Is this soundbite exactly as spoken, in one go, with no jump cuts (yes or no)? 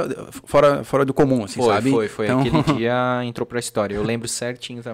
yes